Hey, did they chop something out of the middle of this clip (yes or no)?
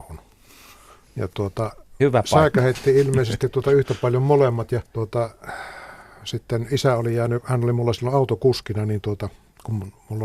yes